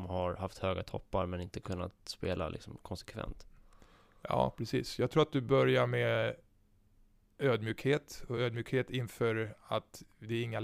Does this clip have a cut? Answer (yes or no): no